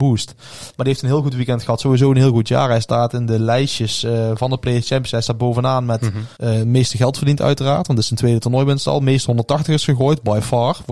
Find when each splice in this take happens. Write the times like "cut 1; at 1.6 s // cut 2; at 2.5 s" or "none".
cut 1; at 6.4 s